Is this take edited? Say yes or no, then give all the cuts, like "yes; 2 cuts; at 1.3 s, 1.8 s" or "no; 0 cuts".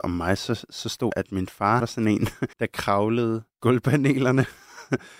yes; 4 cuts; at 1.1 s, 1.8 s, 2.5 s, 3.6 s